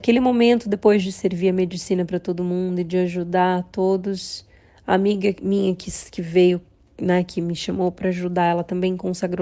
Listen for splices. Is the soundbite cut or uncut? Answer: uncut